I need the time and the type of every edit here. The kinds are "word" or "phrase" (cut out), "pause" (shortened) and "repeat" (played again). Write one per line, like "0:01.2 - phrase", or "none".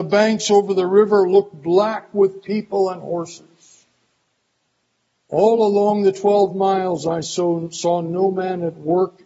none